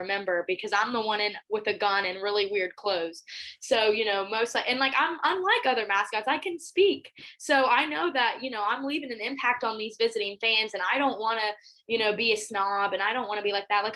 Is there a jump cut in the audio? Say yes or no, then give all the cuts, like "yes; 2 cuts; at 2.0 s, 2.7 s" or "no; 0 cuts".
no; 0 cuts